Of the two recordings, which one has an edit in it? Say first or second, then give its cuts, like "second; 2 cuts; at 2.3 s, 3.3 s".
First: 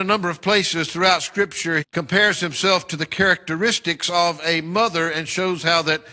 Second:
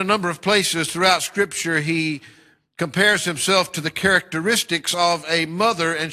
first; 1 cut; at 1.8 s